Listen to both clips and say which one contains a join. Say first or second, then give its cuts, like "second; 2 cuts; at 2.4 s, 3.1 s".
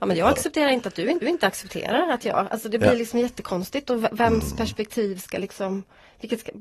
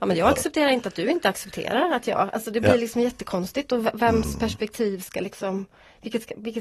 first; 1 cut; at 1.2 s